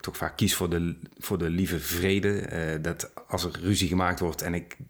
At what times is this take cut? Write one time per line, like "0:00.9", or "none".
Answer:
none